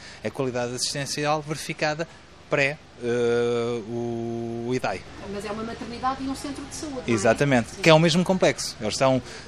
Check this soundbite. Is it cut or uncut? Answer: uncut